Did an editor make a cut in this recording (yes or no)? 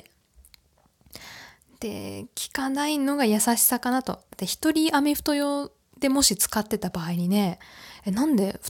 no